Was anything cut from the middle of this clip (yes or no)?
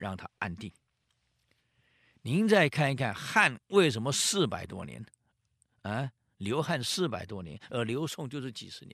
no